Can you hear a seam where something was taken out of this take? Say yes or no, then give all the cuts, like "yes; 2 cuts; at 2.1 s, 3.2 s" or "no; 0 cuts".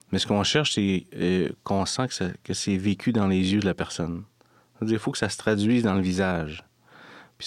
no; 0 cuts